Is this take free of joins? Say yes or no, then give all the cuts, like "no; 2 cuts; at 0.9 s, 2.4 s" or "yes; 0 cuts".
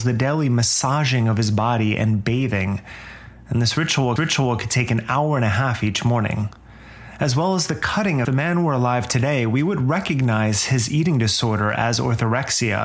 no; 2 cuts; at 4.2 s, 8.2 s